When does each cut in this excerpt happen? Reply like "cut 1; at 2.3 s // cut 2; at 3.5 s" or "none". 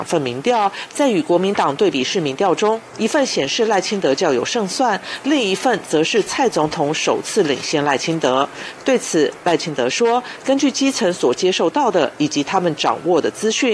none